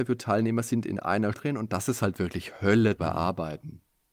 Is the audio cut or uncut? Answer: cut